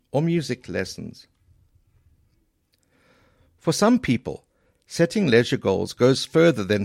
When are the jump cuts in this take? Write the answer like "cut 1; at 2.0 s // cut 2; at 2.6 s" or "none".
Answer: none

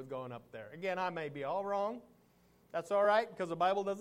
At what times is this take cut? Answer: none

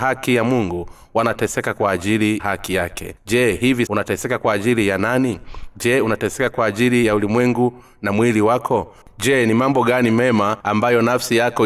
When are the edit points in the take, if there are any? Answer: cut 1; at 2.4 s // cut 2; at 3.2 s // cut 3; at 3.9 s // cut 4; at 10.6 s

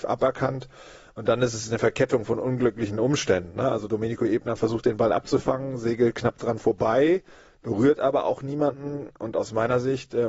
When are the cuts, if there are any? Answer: none

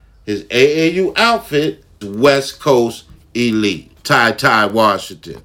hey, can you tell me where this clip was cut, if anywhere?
cut 1; at 2.0 s // cut 2; at 4.0 s

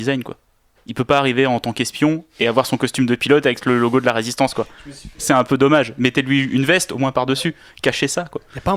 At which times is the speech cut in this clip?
none

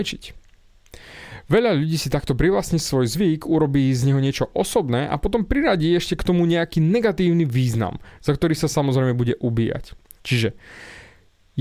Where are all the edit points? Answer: none

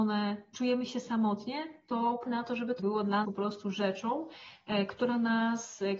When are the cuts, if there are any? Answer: cut 1; at 2.3 s // cut 2; at 2.8 s // cut 3; at 3.2 s

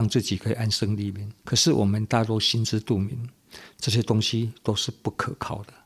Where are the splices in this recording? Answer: cut 1; at 1.4 s

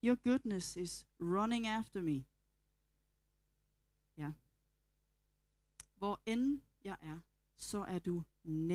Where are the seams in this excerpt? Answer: none

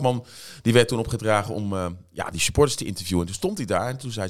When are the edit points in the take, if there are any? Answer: none

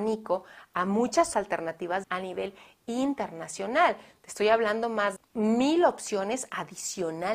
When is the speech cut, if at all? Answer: cut 1; at 1.3 s // cut 2; at 2.0 s // cut 3; at 5.2 s

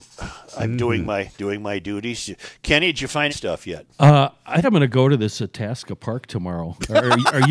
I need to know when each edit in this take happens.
cut 1; at 1.3 s // cut 2; at 3.3 s // cut 3; at 4.6 s

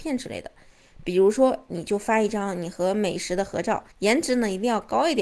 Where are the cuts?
cut 1; at 3.9 s

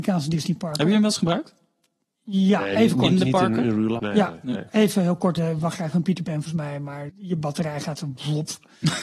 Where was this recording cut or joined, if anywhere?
cut 1; at 4.0 s // cut 2; at 5.4 s // cut 3; at 6.5 s // cut 4; at 7.1 s

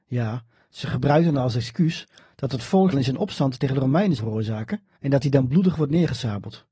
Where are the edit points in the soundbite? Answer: cut 1; at 2.9 s // cut 2; at 4.2 s // cut 3; at 5.0 s

